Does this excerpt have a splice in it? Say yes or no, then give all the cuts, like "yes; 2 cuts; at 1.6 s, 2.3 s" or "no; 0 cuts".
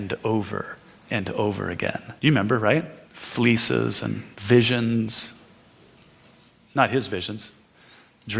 yes; 3 cuts; at 2.2 s, 3.0 s, 4.3 s